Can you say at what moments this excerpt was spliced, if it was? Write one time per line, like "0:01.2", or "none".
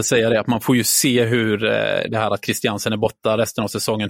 none